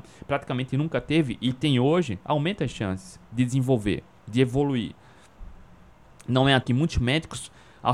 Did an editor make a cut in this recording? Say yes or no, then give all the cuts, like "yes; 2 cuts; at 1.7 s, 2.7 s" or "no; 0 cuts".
yes; 1 cut; at 6.6 s